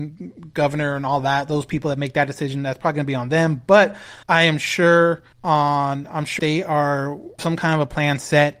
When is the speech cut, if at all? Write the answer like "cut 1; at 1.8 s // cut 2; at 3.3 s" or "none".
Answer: cut 1; at 4.2 s // cut 2; at 5.3 s // cut 3; at 6.4 s // cut 4; at 7.4 s